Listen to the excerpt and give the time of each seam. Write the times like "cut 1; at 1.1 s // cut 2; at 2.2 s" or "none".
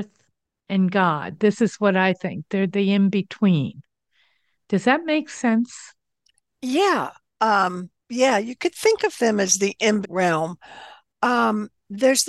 cut 1; at 8.0 s // cut 2; at 10.0 s